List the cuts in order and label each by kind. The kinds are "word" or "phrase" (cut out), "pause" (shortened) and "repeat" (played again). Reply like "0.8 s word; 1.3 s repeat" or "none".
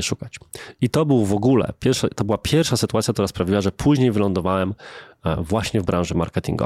none